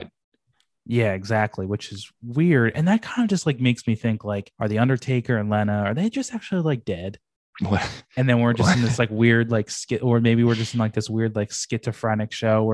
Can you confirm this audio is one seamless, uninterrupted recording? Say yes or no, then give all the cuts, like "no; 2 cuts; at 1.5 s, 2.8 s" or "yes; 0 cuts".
no; 2 cuts; at 4.5 s, 7.4 s